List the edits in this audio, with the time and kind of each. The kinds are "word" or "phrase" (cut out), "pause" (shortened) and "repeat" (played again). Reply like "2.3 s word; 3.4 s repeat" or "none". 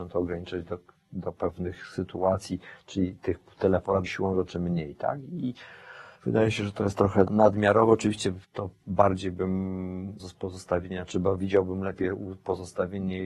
4.1 s word; 6.2 s pause; 7.3 s word; 8.4 s pause; 10.2 s word